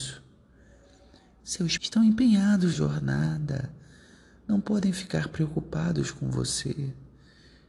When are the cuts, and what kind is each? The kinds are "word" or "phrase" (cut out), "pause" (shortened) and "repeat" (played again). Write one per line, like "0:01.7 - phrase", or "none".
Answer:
0:01.8 - word
0:02.7 - word